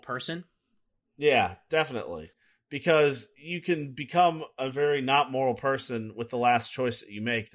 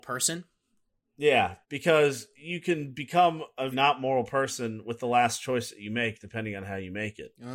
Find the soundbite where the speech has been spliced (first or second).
second